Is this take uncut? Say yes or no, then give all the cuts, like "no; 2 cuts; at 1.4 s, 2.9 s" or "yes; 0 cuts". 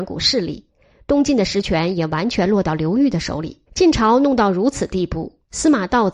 no; 1 cut; at 3.7 s